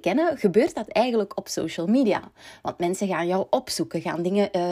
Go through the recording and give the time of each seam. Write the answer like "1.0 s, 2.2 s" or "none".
none